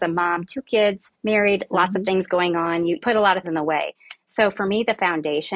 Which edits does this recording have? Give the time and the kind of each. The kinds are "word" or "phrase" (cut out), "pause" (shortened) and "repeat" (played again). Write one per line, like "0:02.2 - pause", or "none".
0:01.1 - pause
0:03.0 - word
0:03.4 - word

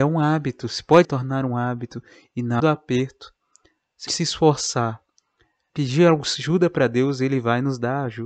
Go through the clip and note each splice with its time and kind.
0:01.0 - word
0:02.6 - word
0:04.1 - word
0:05.7 - word

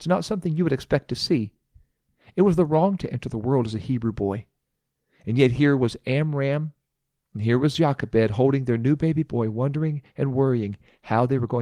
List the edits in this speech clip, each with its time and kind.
0:03.0 - word

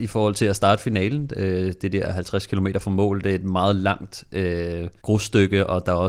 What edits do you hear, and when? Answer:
0:05.0 - pause

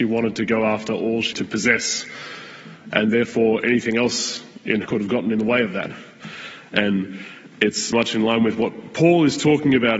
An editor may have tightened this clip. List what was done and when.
0:01.3 - word
0:04.8 - word
0:07.9 - word

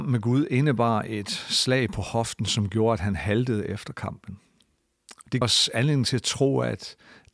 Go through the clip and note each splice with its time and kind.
0:05.4 - word

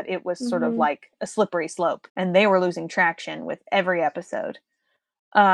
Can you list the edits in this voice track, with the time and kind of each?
0:02.1 - pause

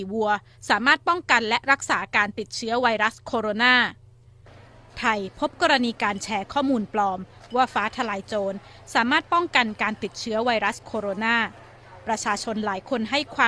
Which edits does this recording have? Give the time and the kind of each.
none

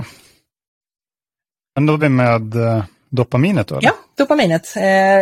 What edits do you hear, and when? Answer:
0:02.0 - word

